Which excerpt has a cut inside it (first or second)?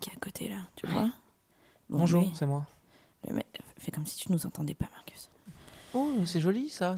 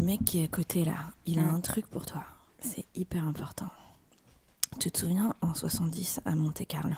second